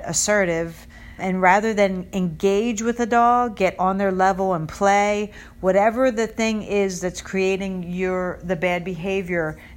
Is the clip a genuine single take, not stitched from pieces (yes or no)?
no